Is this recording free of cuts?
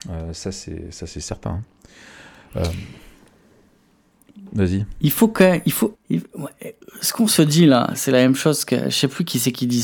no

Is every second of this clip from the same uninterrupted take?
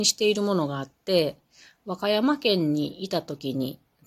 yes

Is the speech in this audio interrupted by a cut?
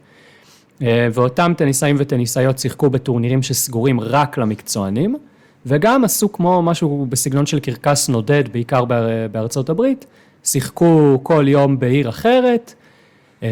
no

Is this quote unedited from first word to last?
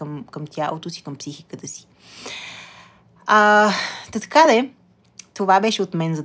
yes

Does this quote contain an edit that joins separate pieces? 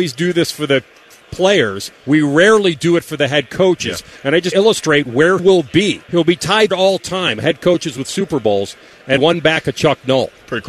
yes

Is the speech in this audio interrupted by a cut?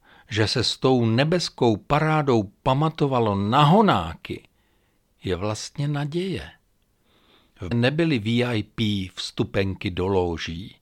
yes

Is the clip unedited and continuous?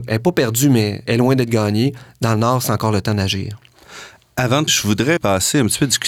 no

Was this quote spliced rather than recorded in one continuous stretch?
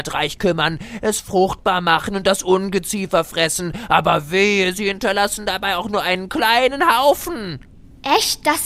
no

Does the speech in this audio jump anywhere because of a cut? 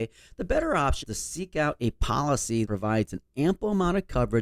yes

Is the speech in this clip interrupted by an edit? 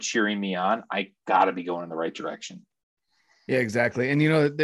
no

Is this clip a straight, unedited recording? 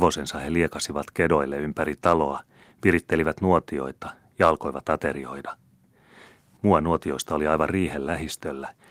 yes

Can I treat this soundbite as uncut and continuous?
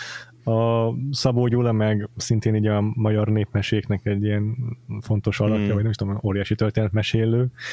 yes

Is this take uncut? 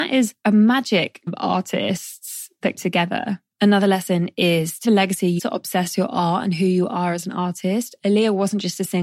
no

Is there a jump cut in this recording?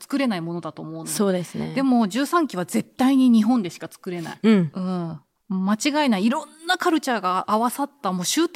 no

